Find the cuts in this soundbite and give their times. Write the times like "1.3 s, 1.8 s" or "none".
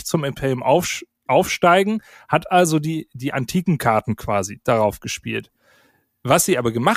none